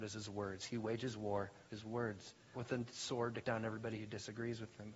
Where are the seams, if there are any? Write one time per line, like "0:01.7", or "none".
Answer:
0:01.7
0:02.5
0:03.4

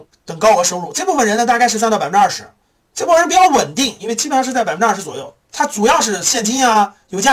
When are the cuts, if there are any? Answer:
0:04.0
0:05.4

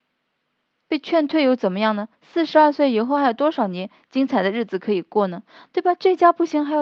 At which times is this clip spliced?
0:02.1

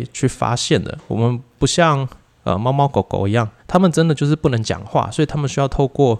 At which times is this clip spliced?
0:03.6

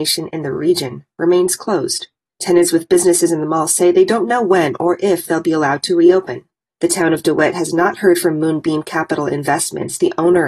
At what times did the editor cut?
none

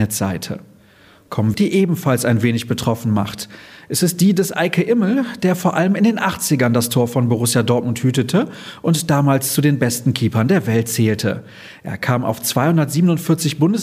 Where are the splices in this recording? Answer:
0:01.5

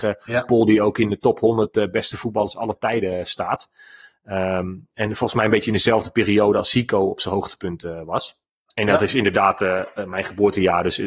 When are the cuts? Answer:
none

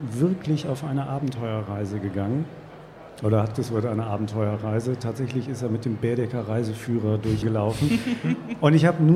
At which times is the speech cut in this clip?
0:03.5
0:07.4

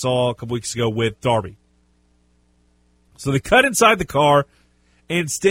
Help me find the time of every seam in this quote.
none

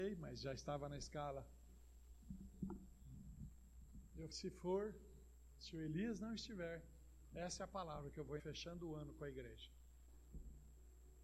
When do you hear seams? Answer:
0:04.3
0:08.4

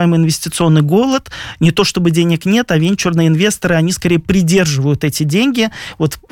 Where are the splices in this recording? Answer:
none

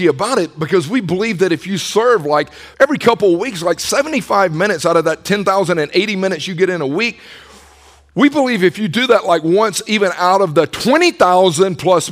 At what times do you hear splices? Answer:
0:02.7

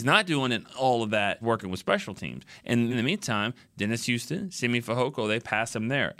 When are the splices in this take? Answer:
0:01.4
0:02.9

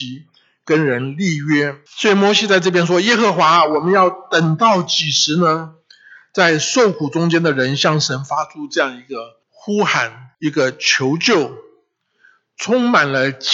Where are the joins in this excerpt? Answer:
0:01.9
0:05.8
0:09.4
0:10.3

